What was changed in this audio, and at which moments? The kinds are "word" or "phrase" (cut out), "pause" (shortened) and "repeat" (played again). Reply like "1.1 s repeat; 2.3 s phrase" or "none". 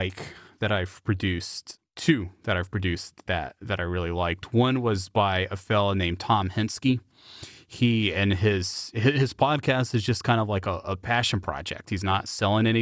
none